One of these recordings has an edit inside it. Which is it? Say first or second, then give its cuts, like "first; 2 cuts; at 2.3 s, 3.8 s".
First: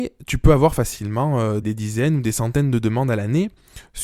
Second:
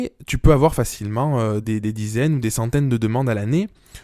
first; 1 cut; at 1.6 s